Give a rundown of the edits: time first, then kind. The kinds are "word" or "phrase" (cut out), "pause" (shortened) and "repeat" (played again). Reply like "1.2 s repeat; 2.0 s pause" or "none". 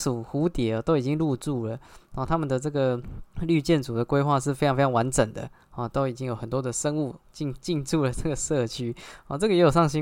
3.3 s pause; 7.2 s pause